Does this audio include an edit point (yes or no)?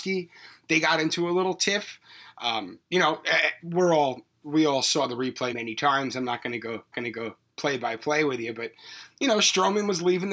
yes